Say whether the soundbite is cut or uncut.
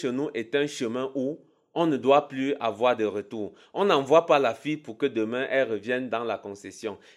uncut